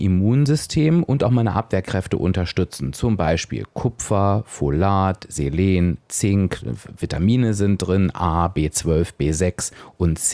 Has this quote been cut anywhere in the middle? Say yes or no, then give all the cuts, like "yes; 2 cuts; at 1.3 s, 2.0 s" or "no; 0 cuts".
no; 0 cuts